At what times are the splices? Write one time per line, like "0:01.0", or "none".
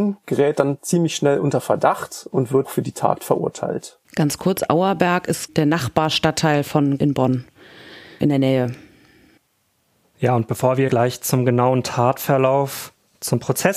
0:02.6
0:04.0
0:07.0
0:08.2
0:10.9